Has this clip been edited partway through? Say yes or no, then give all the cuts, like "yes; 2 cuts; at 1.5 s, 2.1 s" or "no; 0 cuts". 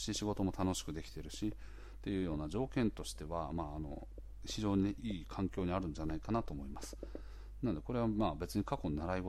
yes; 1 cut; at 5.0 s